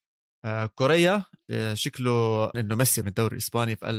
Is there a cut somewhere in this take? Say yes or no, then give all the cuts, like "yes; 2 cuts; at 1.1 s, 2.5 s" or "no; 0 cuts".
yes; 2 cuts; at 2.5 s, 3.0 s